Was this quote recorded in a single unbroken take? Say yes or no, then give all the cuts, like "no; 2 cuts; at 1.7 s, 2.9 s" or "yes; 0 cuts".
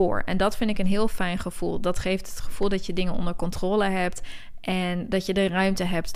yes; 0 cuts